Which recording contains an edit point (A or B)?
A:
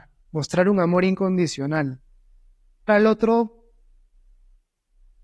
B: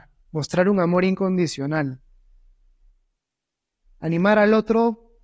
A